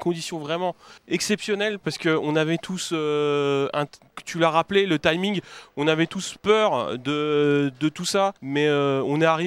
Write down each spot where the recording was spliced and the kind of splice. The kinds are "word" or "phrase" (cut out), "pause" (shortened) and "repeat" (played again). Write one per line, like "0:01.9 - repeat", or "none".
0:01.0 - pause
0:08.4 - pause